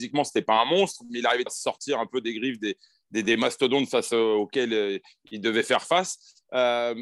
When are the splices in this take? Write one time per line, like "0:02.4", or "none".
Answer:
0:01.5